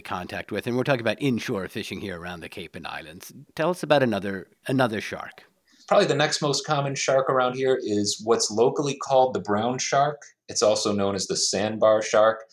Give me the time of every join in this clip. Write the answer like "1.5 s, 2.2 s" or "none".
5.6 s